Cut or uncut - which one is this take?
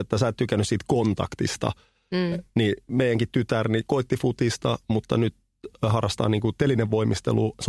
uncut